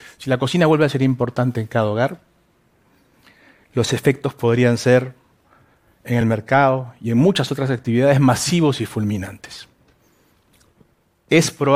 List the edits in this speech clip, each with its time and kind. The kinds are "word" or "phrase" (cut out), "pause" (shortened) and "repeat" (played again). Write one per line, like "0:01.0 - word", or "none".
none